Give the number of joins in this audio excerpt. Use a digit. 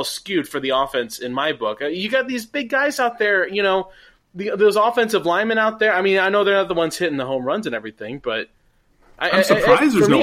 0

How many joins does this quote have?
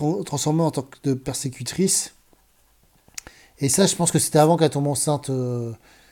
0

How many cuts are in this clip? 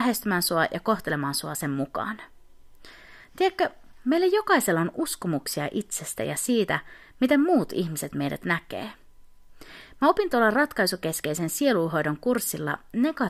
0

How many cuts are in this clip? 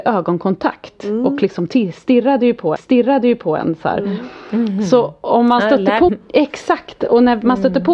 2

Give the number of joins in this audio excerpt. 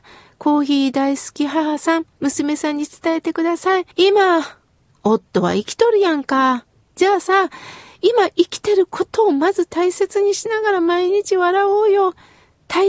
2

